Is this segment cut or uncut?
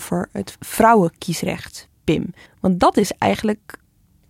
cut